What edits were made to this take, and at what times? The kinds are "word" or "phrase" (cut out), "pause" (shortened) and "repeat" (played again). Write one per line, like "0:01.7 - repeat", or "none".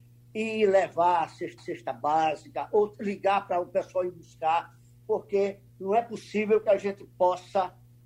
0:01.6 - repeat
0:05.7 - pause